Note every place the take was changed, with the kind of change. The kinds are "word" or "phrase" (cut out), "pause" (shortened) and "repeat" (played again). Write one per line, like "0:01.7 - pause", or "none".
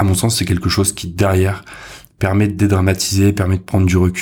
none